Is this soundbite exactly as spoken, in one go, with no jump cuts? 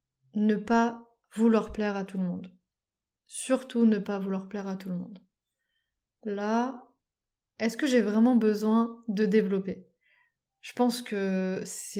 yes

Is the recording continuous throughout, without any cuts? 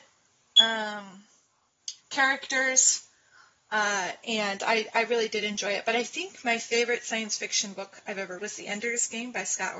no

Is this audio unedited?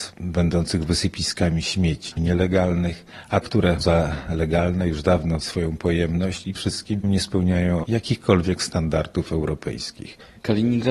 no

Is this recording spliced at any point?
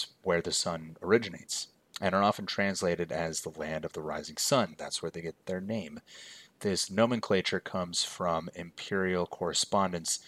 no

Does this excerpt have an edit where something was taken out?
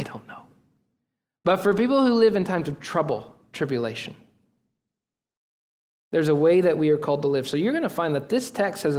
no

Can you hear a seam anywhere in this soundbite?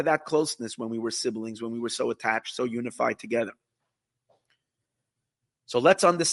no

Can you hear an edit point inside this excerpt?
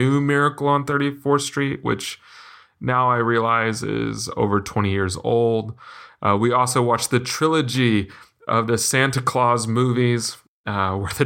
no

